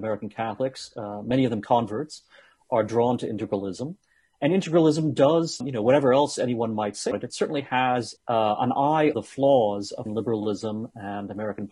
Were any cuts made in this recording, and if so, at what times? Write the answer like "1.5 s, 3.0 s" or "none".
5.6 s, 7.1 s, 8.2 s, 9.1 s, 10.1 s